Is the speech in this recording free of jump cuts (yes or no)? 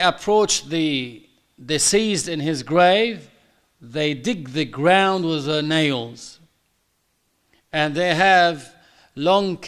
yes